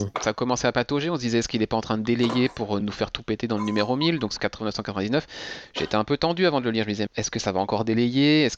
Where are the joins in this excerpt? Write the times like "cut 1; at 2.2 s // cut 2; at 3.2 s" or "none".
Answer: cut 1; at 2.8 s // cut 2; at 4.4 s // cut 3; at 7.1 s